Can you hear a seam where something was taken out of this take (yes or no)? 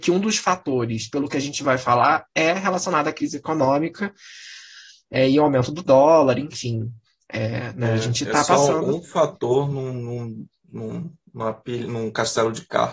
no